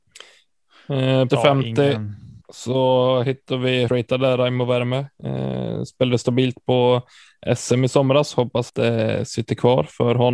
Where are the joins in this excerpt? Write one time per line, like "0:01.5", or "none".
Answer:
0:01.3
0:02.4
0:03.9
0:08.7

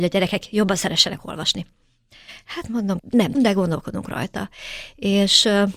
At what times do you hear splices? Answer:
0:03.0
0:03.3

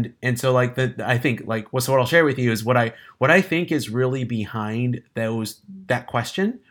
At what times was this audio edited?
none

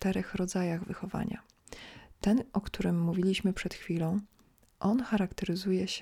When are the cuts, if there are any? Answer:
none

